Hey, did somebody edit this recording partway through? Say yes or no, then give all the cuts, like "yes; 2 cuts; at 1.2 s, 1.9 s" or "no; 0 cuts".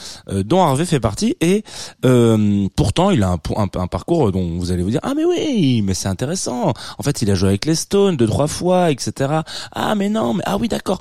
yes; 1 cut; at 2.7 s